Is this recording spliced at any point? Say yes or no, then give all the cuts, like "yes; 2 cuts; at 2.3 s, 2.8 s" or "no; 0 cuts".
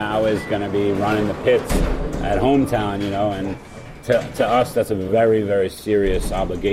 no; 0 cuts